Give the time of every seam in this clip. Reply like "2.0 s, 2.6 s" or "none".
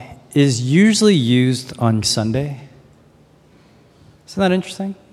2.0 s